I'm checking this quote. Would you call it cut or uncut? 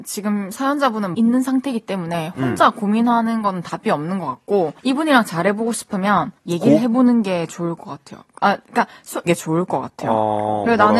cut